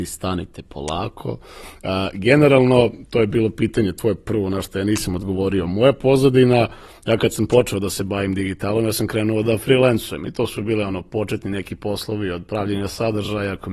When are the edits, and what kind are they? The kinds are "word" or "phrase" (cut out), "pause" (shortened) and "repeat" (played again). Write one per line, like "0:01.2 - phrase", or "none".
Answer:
none